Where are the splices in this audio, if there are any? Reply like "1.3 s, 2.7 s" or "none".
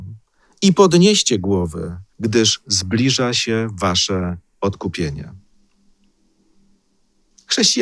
2.1 s